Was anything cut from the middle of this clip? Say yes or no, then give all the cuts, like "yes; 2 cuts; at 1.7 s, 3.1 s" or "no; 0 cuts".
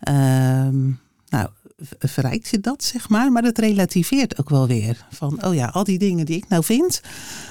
no; 0 cuts